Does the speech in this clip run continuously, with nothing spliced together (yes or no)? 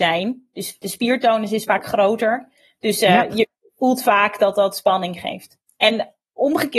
yes